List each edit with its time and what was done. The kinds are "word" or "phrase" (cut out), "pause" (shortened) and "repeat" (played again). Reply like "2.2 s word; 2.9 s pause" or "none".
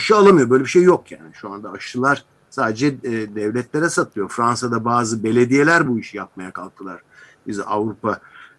none